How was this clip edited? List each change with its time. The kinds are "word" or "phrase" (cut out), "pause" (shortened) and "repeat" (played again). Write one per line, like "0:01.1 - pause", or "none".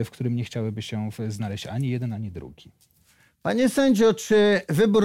none